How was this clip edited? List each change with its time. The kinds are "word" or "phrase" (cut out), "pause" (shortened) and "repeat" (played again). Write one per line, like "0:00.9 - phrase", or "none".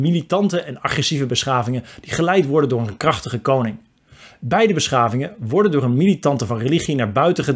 0:06.5 - word